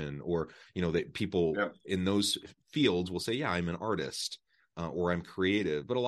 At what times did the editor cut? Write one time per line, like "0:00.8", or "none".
0:02.6